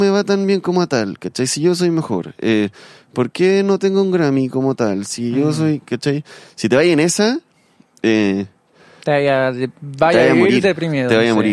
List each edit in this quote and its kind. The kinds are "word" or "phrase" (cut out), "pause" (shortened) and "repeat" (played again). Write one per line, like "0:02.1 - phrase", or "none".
none